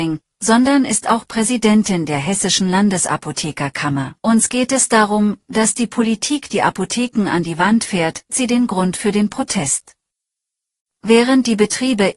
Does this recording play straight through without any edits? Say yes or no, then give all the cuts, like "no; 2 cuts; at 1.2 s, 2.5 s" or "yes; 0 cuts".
no; 2 cuts; at 4.2 s, 8.3 s